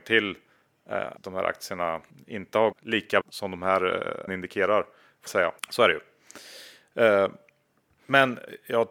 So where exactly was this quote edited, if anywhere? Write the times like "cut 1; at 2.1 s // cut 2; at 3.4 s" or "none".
cut 1; at 1.2 s // cut 2; at 2.1 s // cut 3; at 2.7 s // cut 4; at 3.2 s // cut 5; at 4.3 s // cut 6; at 5.3 s // cut 7; at 5.6 s